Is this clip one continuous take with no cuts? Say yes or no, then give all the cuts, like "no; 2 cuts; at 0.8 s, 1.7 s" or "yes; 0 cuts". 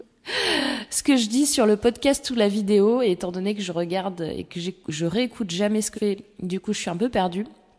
no; 1 cut; at 5.9 s